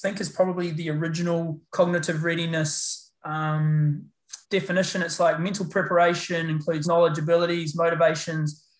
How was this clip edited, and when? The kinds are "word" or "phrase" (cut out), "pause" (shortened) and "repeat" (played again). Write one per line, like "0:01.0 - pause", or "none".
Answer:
0:01.6 - pause
0:04.4 - pause
0:06.8 - word